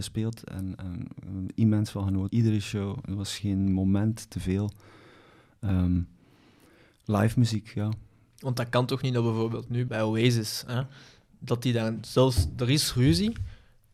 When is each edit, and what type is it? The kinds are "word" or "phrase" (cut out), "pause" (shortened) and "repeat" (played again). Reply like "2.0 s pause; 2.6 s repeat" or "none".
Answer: 2.3 s word; 3.4 s word; 9.9 s word